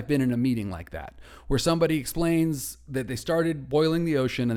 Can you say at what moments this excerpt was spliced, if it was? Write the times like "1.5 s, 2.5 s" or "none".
none